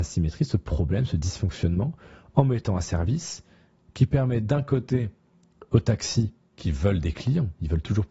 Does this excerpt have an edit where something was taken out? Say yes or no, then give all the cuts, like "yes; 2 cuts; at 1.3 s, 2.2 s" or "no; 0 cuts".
no; 0 cuts